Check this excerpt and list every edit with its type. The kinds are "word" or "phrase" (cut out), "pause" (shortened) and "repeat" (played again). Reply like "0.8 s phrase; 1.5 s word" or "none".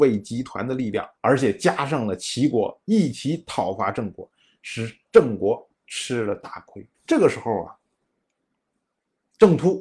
1.2 s pause; 5.7 s pause; 6.9 s pause